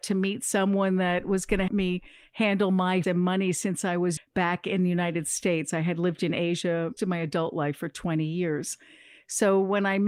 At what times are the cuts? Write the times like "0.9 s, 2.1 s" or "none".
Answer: 1.7 s, 3.0 s, 4.2 s, 7.0 s